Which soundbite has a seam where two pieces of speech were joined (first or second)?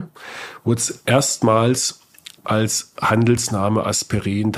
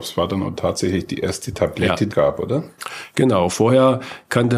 second